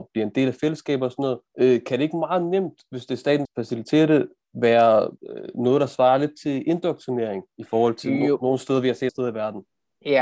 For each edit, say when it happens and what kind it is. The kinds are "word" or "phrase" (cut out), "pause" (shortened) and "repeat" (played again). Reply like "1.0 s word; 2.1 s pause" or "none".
1.5 s pause; 3.4 s phrase; 5.2 s pause; 9.1 s word

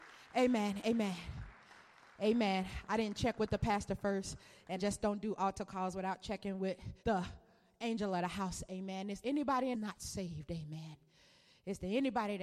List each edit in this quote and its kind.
4.8 s word; 7.0 s pause; 9.2 s word; 9.7 s phrase

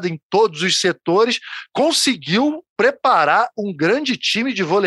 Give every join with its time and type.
2.7 s pause

